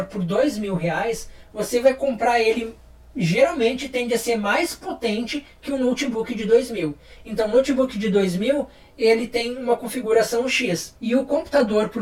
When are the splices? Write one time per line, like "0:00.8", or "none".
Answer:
none